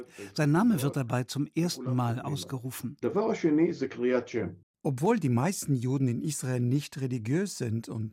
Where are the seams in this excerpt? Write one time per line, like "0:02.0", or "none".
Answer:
none